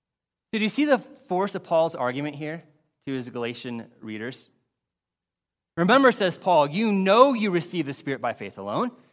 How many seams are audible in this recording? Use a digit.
0